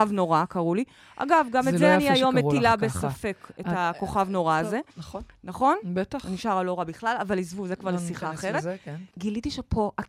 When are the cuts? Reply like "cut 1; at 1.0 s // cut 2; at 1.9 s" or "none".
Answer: cut 1; at 4.9 s // cut 2; at 9.1 s